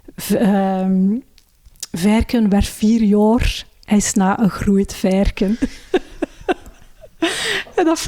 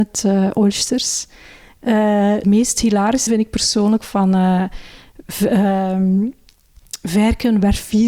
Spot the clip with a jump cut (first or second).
second